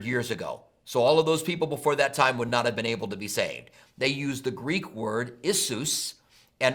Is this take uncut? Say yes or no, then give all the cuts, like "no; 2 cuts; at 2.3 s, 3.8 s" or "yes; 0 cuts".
yes; 0 cuts